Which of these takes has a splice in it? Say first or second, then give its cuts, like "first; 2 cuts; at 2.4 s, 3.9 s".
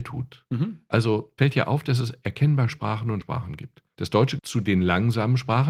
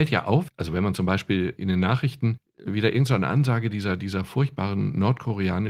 first; 4 cuts; at 1.4 s, 2.7 s, 3.2 s, 4.4 s